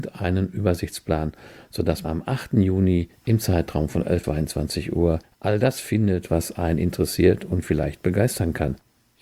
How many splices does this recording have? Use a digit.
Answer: 2